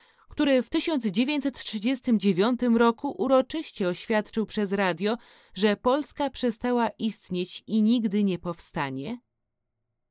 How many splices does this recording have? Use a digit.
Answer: 0